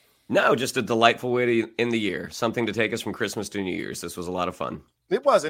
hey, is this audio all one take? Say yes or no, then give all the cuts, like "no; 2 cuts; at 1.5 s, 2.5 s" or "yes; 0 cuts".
yes; 0 cuts